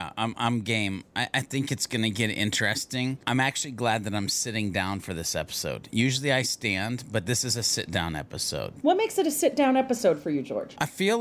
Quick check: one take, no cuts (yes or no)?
yes